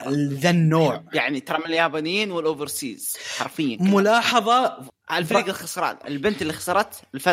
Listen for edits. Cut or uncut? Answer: uncut